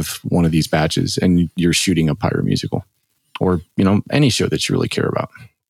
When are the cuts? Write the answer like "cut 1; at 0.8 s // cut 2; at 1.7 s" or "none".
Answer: none